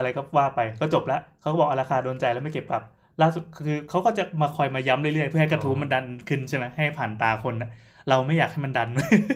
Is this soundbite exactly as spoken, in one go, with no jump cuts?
yes; 0 cuts

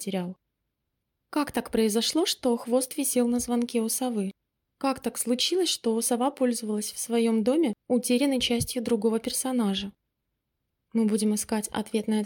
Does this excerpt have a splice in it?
no; 0 cuts

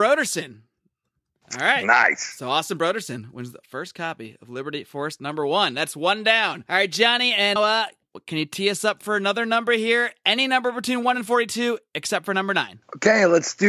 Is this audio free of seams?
no; 1 cut; at 7.6 s

